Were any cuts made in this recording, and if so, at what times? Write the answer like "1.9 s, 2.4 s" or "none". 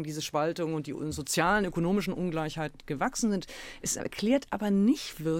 none